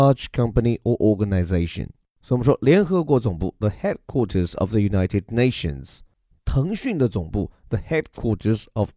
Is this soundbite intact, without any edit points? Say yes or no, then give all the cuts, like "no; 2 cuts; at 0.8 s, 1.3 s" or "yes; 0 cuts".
yes; 0 cuts